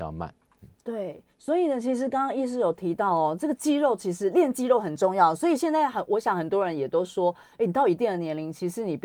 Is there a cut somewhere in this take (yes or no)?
yes